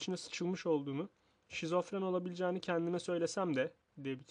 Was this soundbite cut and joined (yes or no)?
no